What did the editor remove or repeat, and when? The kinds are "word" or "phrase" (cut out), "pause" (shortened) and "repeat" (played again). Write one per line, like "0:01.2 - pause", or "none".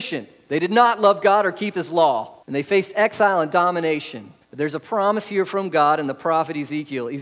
0:02.4 - pause
0:04.4 - pause